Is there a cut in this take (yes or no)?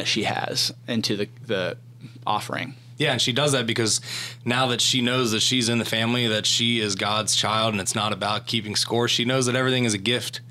no